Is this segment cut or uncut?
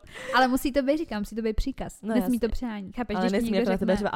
cut